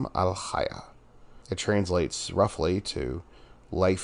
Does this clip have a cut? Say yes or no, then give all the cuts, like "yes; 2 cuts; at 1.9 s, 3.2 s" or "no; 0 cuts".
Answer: yes; 1 cut; at 1.4 s